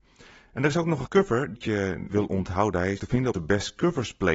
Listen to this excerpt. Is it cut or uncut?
cut